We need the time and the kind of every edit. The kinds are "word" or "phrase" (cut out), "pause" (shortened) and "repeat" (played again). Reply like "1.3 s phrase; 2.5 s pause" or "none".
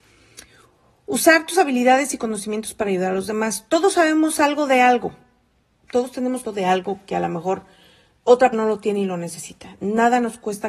6.4 s word; 8.5 s word